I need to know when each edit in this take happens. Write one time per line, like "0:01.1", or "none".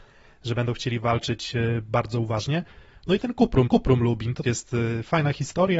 0:03.7
0:04.4